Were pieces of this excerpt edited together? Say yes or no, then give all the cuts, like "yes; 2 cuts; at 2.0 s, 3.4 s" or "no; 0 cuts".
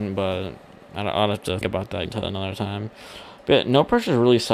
yes; 2 cuts; at 1.6 s, 2.1 s